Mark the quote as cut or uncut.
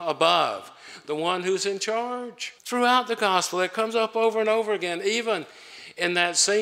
cut